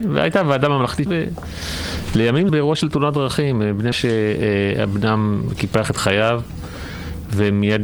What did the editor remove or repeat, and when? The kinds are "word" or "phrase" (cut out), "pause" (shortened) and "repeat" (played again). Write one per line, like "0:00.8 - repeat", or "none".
0:01.1 - word
0:02.5 - phrase
0:03.9 - word

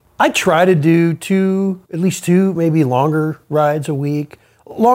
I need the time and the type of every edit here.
0:01.8 - pause

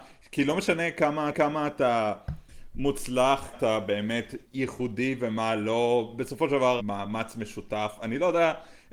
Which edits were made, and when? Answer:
0:01.3 - repeat
0:03.5 - word
0:04.4 - pause
0:06.8 - phrase

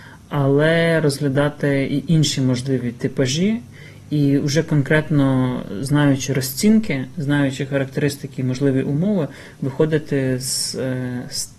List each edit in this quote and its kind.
none

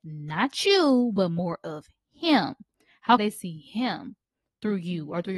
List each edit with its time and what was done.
0:03.2 - word

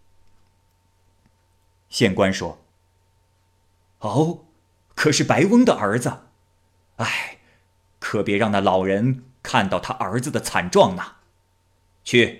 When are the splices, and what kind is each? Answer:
none

